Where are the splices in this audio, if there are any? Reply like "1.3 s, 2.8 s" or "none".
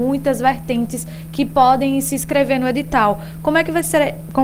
none

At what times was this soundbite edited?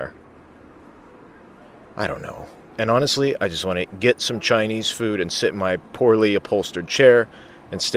none

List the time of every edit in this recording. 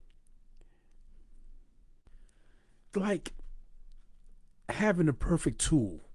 2.9 s

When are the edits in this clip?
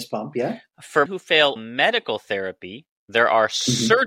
1.1 s, 1.6 s

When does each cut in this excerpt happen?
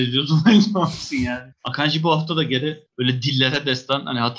none

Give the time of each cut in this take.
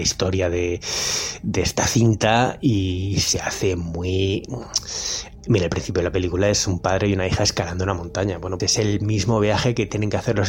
8.6 s

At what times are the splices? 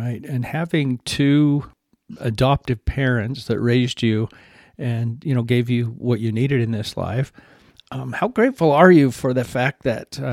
none

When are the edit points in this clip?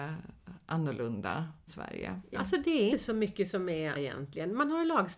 1.7 s, 2.3 s, 2.9 s, 3.9 s

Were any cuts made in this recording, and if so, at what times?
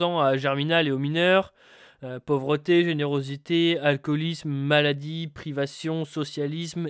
none

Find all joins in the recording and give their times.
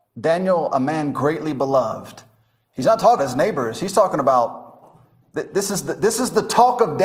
3.2 s

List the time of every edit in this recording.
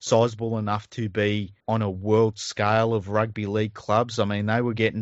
1.6 s

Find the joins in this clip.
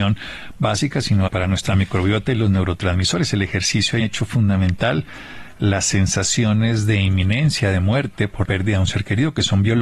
1.3 s, 4.0 s, 8.4 s

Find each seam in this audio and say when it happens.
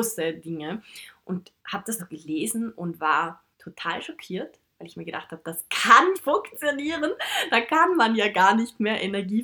1.6 s, 2.0 s, 3.5 s, 6.1 s

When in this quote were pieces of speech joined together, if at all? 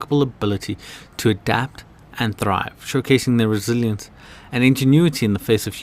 none

